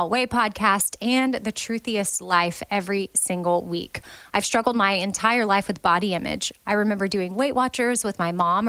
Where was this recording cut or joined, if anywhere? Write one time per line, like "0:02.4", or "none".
none